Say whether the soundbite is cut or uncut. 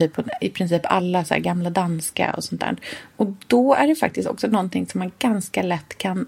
uncut